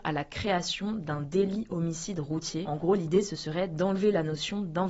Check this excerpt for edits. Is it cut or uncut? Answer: uncut